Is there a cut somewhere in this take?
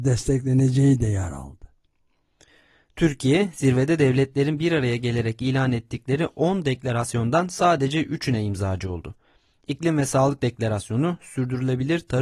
no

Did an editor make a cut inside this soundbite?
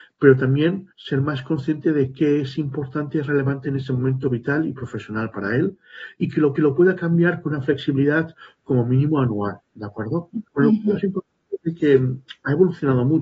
yes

